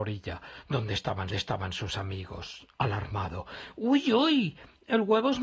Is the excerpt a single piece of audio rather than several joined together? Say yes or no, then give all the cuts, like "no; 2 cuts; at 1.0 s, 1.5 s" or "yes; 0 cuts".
no; 1 cut; at 1.3 s